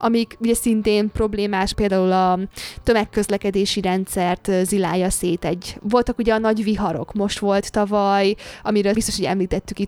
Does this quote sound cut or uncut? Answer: cut